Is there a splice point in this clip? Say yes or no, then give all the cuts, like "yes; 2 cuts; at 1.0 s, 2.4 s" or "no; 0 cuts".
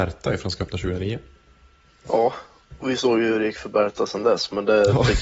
no; 0 cuts